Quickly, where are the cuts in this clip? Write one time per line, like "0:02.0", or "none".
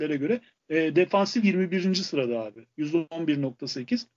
0:01.4
0:02.7

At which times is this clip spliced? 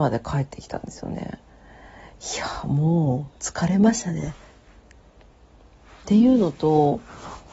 none

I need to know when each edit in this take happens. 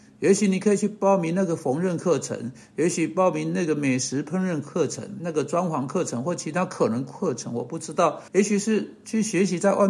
0:08.3

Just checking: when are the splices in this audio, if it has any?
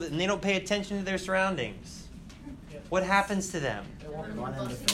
none

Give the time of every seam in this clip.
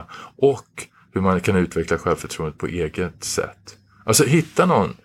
none

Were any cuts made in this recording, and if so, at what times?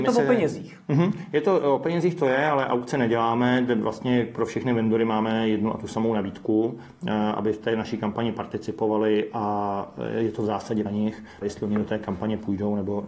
0:10.9
0:11.4

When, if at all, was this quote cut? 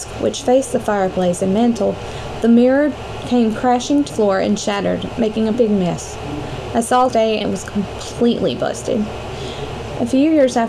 0:04.1
0:05.5
0:07.1
0:07.4

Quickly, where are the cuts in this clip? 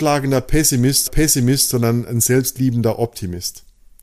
0:01.1

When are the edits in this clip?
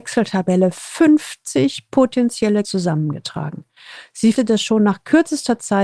0:02.6
0:04.4

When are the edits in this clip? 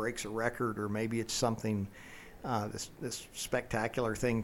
0:01.3

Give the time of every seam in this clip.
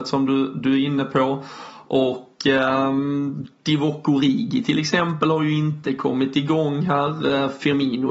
none

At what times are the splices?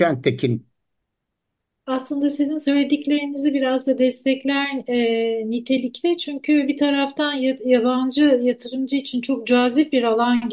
none

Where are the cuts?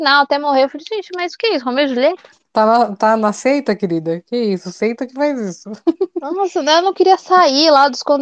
none

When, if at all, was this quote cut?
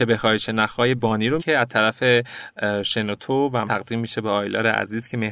0:01.0
0:01.4
0:03.7

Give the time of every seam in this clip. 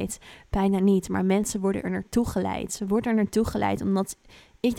none

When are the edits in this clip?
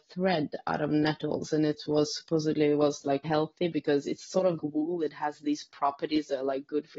0:03.2
0:04.6

